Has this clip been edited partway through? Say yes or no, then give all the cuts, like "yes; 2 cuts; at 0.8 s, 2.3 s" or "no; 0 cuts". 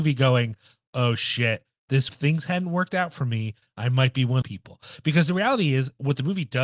yes; 2 cuts; at 2.1 s, 4.4 s